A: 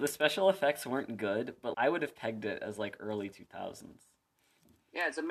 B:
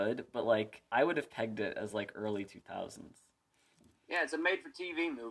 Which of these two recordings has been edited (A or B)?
A